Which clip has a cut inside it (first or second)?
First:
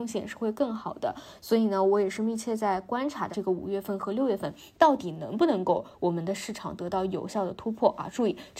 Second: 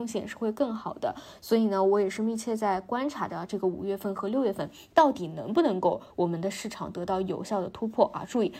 first